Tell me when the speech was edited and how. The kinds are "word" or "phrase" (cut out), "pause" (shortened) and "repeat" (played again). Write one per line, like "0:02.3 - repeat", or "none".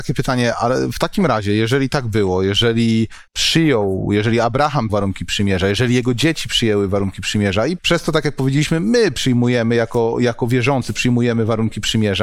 0:03.3 - pause
0:04.9 - word
0:07.8 - phrase